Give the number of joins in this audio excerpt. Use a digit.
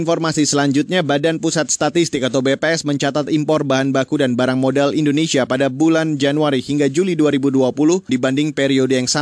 1